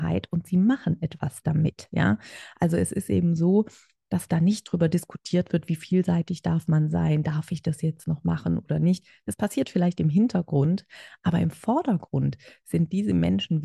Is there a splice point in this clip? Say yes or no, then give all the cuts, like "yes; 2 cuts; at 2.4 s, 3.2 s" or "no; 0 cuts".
no; 0 cuts